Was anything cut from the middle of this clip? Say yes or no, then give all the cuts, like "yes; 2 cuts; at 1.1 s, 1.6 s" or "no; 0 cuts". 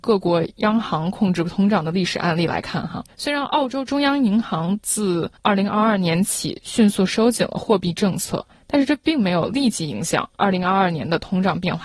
yes; 4 cuts; at 3.1 s, 5.3 s, 8.5 s, 10.3 s